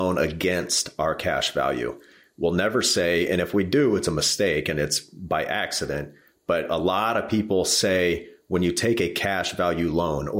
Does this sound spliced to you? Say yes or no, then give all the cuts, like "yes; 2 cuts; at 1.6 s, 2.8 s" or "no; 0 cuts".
no; 0 cuts